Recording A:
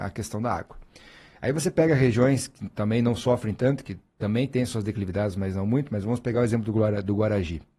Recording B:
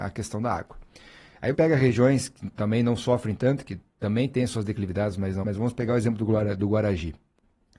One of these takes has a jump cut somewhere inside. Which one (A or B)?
B